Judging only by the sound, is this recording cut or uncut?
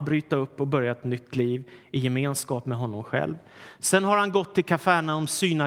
uncut